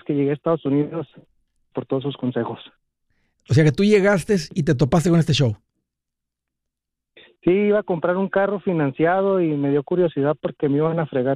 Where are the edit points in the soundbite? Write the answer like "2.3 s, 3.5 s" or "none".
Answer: 1.7 s